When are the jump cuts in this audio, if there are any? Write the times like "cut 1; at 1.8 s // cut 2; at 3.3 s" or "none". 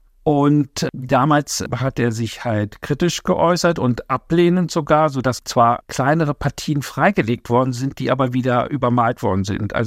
none